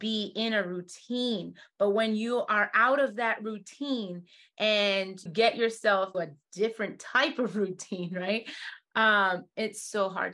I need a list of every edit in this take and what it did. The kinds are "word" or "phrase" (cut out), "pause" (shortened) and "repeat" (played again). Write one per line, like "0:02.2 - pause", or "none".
0:05.3 - word
0:06.1 - word